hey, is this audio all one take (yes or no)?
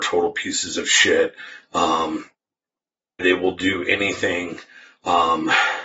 no